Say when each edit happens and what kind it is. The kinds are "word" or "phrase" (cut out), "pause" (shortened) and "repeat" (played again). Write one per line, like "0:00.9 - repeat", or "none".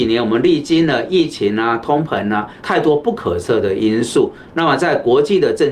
0:02.6 - phrase